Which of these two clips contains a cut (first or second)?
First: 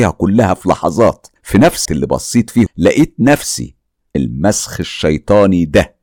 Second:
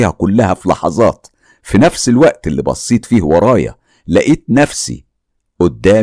first